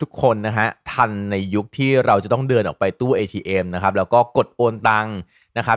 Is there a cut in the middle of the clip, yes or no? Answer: no